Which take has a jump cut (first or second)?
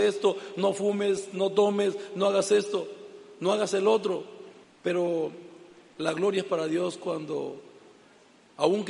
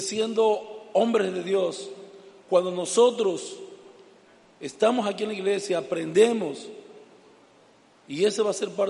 first